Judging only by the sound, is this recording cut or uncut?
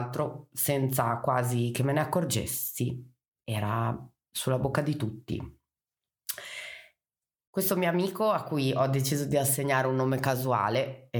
uncut